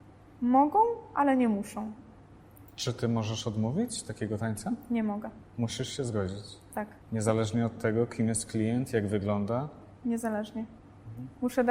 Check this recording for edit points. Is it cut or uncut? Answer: cut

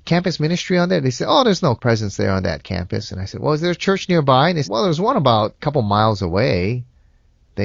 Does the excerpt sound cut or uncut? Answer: cut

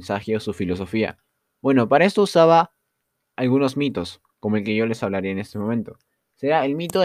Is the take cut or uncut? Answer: uncut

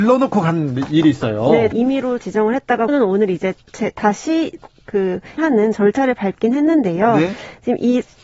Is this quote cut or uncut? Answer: cut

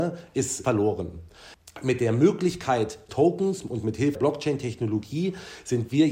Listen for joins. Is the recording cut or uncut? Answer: cut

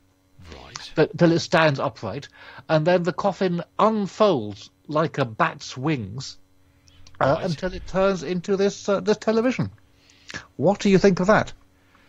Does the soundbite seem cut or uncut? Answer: uncut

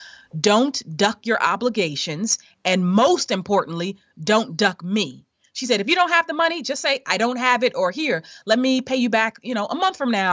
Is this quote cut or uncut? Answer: uncut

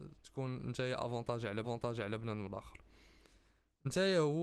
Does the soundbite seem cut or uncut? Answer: cut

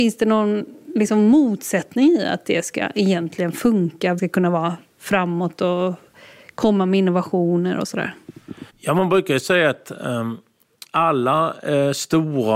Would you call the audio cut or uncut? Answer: cut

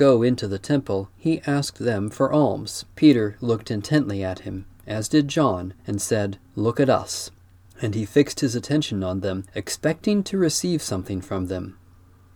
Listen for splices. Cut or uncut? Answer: cut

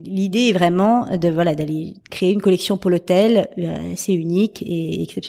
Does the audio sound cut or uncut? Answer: cut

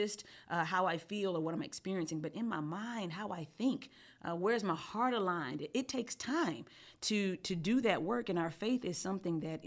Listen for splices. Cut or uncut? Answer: uncut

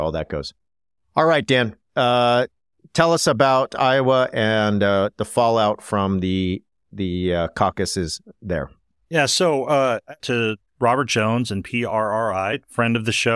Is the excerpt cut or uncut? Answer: cut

